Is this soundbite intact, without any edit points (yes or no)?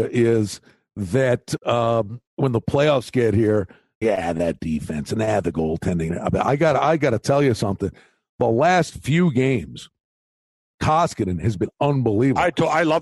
no